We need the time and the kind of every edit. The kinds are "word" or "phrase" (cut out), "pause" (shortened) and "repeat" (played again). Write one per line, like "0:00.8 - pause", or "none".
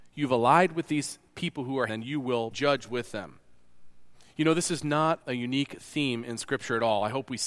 0:01.3 - pause
0:01.9 - phrase
0:02.5 - word
0:04.1 - pause
0:05.2 - word